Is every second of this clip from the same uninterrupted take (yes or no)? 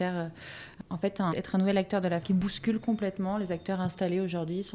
no